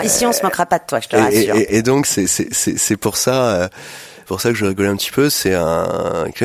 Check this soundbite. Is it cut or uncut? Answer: cut